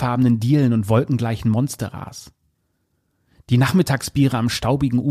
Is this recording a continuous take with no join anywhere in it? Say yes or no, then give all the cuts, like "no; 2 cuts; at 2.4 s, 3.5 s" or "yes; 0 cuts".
yes; 0 cuts